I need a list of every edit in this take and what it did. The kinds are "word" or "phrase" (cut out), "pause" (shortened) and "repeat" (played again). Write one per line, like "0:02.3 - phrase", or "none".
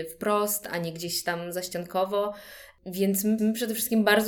0:03.4 - repeat

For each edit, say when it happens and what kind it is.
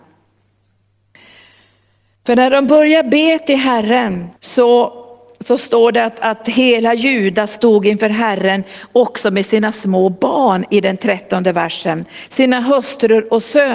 0:04.4 - pause

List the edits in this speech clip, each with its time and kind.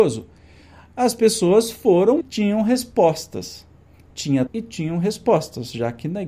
0:02.2 - word
0:04.5 - word

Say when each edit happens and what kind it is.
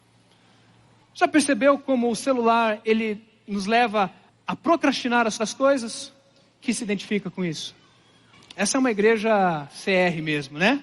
0:02.8 - word
0:04.3 - pause
0:05.4 - repeat
0:06.6 - word
0:08.3 - pause

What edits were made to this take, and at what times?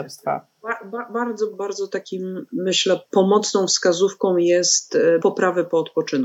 0:01.5 - word
0:05.2 - word

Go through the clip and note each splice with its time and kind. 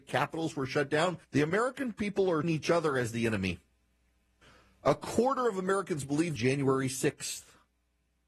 0:01.2 - pause
0:02.4 - word
0:04.4 - pause
0:06.4 - phrase

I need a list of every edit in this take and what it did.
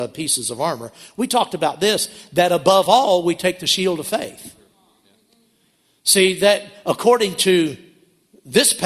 none

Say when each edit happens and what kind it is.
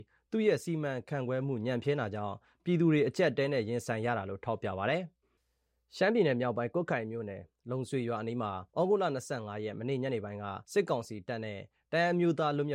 0:05.2 - pause
0:08.7 - pause
0:10.6 - pause

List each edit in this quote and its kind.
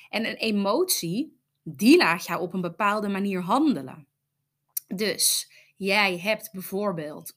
none

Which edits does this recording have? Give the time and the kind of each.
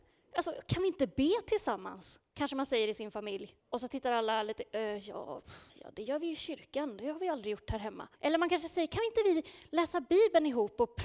0:02.3 - pause
0:03.6 - pause
0:05.7 - pause
0:08.1 - pause

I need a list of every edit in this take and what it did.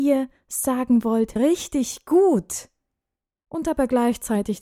0:01.4 - phrase

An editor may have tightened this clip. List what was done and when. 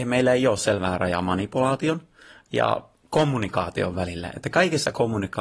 none

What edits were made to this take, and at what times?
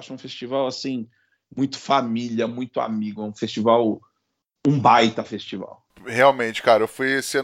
none

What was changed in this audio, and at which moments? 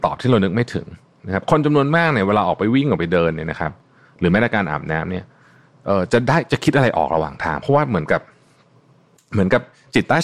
none

